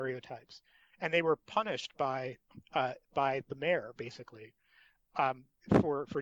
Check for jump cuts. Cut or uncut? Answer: uncut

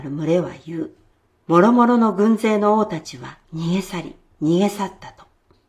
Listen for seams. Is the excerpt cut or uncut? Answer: cut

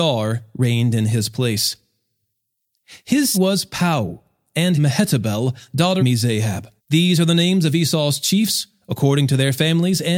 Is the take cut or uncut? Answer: cut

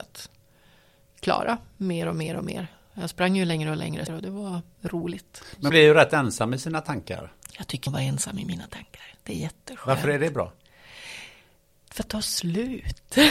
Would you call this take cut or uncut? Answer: cut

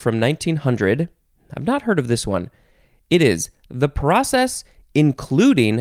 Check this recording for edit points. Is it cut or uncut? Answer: cut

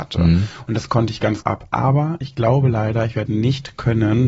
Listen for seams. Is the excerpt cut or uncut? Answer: cut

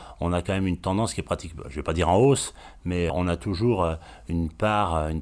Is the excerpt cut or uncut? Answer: cut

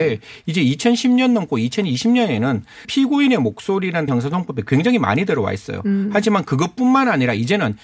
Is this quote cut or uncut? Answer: cut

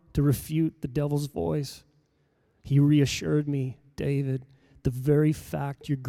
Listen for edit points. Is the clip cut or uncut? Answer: uncut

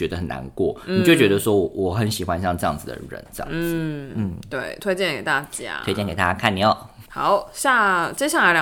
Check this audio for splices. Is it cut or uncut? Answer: cut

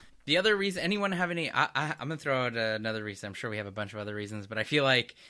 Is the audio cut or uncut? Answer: uncut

